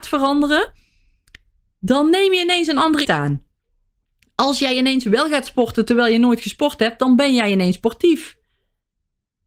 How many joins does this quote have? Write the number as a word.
one